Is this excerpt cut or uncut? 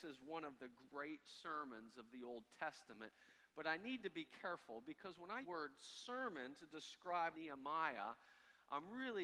cut